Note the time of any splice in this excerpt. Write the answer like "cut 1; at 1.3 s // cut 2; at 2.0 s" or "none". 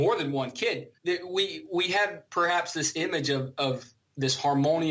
cut 1; at 1.0 s